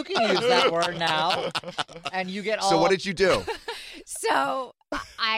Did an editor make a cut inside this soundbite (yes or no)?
no